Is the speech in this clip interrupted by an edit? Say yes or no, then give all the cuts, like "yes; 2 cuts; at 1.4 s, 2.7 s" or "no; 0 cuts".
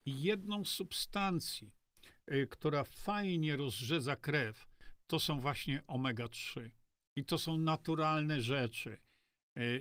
no; 0 cuts